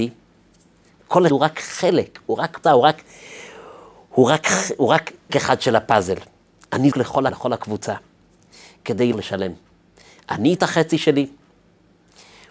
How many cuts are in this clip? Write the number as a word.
seven